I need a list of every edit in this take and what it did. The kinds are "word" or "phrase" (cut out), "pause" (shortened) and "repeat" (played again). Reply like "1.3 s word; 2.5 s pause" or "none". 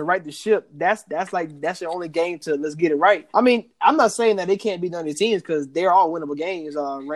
3.3 s pause